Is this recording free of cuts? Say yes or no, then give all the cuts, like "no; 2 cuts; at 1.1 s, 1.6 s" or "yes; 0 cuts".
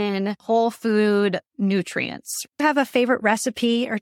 no; 1 cut; at 2.6 s